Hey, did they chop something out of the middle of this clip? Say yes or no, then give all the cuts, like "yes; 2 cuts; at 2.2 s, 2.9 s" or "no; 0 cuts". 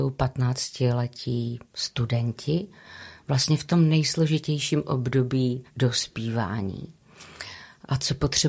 yes; 2 cuts; at 1.6 s, 5.7 s